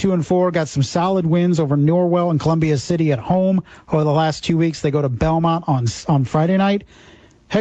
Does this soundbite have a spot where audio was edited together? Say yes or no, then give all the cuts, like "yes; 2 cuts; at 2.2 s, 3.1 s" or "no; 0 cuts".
no; 0 cuts